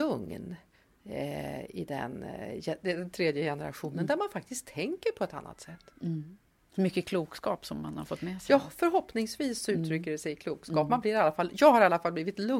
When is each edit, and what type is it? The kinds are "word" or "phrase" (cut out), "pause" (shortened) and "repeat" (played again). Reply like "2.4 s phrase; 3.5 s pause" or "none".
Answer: none